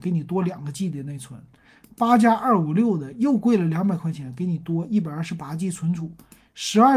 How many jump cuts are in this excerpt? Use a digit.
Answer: 0